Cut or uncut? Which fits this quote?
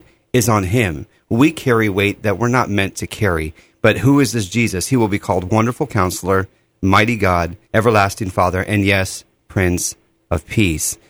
cut